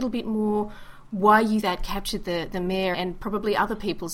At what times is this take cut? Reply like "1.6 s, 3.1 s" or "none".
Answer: 1.6 s, 2.9 s